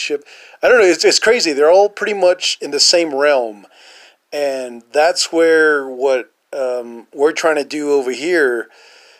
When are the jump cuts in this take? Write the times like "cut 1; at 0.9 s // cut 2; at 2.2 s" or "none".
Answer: none